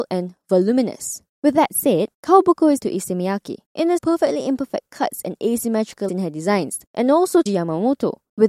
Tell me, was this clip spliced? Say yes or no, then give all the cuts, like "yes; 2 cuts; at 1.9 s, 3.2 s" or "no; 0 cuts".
yes; 7 cuts; at 1.3 s, 2.1 s, 2.8 s, 4.0 s, 6.1 s, 6.9 s, 7.5 s